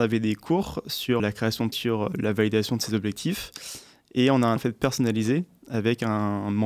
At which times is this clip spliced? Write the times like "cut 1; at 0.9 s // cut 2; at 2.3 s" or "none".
cut 1; at 1.2 s // cut 2; at 1.7 s // cut 3; at 2.1 s // cut 4; at 4.6 s